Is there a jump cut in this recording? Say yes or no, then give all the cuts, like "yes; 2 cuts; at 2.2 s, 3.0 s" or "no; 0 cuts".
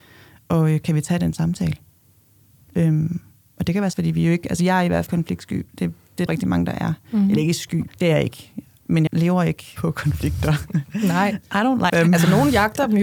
yes; 7 cuts; at 3.9 s, 5.1 s, 6.3 s, 7.9 s, 9.1 s, 9.8 s, 11.9 s